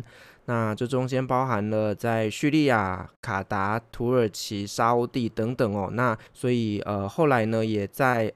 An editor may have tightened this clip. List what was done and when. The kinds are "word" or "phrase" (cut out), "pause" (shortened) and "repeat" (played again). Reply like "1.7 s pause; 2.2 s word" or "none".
6.3 s pause